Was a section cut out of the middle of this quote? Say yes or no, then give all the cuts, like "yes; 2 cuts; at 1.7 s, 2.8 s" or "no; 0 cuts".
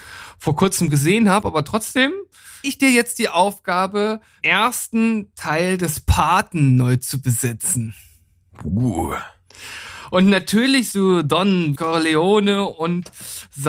yes; 4 cuts; at 2.6 s, 4.4 s, 10.9 s, 11.8 s